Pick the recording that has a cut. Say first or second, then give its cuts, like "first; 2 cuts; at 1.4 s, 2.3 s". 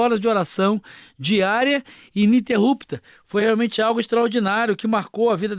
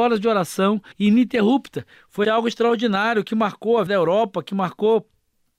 second; 3 cuts; at 0.9 s, 2.2 s, 3.9 s